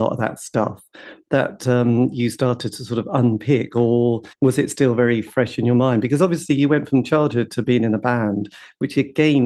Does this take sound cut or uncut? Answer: cut